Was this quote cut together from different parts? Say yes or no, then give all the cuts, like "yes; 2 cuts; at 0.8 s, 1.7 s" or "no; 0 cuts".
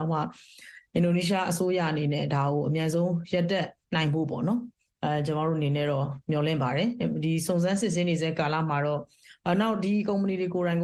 yes; 1 cut; at 3.8 s